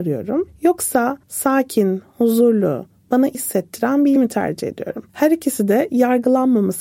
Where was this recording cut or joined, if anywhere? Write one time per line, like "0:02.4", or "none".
0:01.2
0:03.3
0:04.2
0:05.1